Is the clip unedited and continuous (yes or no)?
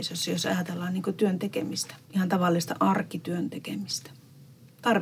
no